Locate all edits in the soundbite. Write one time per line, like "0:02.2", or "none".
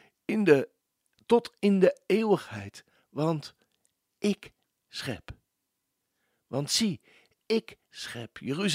none